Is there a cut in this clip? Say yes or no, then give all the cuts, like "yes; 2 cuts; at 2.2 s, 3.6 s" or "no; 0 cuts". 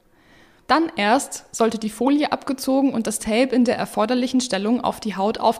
no; 0 cuts